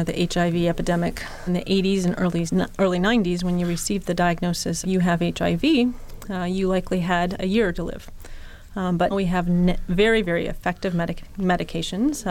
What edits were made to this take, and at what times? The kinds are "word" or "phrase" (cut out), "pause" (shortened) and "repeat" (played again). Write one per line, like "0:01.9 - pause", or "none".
0:01.5 - phrase
0:04.8 - word
0:07.7 - word
0:09.1 - word